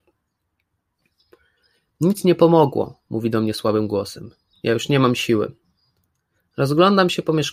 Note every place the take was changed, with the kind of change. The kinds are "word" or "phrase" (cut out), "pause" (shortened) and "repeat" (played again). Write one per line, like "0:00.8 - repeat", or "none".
none